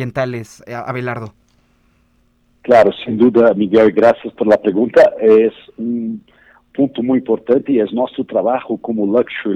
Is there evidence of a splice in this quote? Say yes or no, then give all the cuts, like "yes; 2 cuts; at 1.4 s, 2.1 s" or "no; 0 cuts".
no; 0 cuts